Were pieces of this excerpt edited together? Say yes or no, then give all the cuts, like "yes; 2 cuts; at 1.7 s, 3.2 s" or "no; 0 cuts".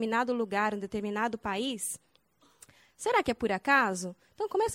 no; 0 cuts